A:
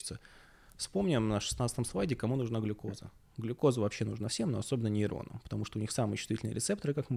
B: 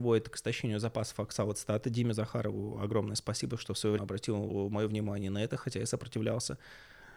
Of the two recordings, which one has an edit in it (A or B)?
B